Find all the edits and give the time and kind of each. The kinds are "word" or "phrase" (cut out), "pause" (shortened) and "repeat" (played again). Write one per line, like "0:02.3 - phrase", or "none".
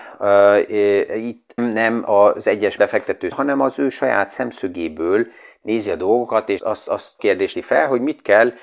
0:01.6 - word
0:02.8 - word
0:03.3 - word
0:06.6 - word
0:07.2 - word
0:07.5 - word